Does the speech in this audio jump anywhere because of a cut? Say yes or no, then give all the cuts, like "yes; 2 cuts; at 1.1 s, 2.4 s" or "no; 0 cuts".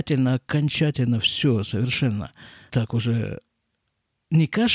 yes; 1 cut; at 2.7 s